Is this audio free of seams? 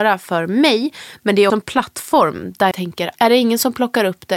no; 3 cuts; at 1.5 s, 2.7 s, 3.1 s

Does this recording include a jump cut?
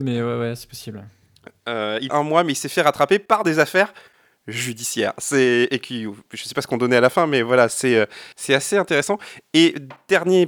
yes; 2 cuts; at 2.1 s, 8.3 s

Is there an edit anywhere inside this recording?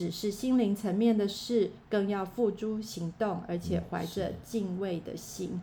no; 0 cuts

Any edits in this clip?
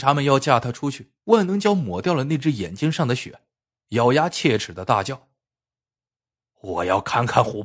yes; 1 cut; at 1.2 s

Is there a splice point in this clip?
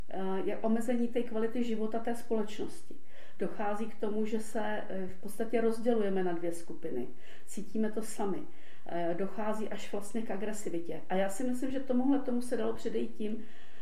no; 0 cuts

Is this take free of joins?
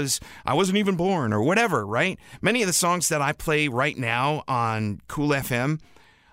yes; 0 cuts

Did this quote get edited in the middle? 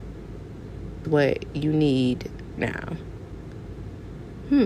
yes; 2 cuts; at 1.0 s, 2.6 s

